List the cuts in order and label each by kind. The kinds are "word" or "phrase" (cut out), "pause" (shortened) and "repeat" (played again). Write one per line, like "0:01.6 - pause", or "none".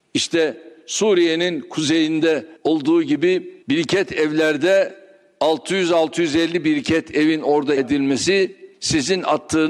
0:02.6 - pause
0:03.6 - pause
0:07.8 - word
0:08.7 - pause